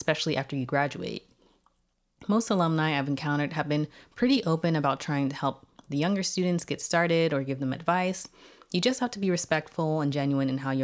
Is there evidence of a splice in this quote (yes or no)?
no